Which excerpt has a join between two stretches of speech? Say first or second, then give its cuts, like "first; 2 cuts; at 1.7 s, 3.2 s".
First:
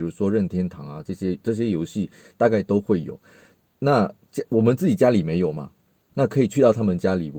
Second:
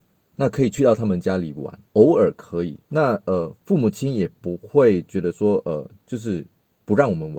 second; 1 cut; at 2.8 s